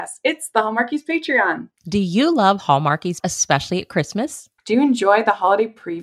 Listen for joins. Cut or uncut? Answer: cut